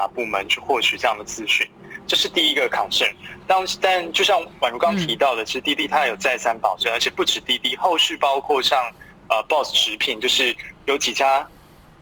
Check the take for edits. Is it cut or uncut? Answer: uncut